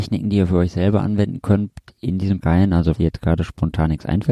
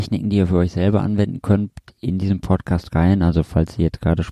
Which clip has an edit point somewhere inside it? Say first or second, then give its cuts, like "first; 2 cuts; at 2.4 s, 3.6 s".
first; 2 cuts; at 2.4 s, 3.0 s